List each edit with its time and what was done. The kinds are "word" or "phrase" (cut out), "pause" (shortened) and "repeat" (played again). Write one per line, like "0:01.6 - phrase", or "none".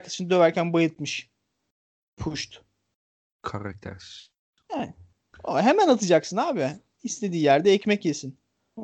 none